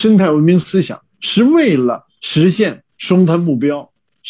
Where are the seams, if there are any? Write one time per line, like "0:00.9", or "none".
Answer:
0:02.9